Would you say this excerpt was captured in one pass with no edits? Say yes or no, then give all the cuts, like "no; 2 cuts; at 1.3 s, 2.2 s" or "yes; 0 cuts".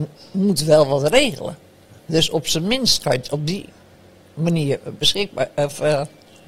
no; 1 cut; at 2.0 s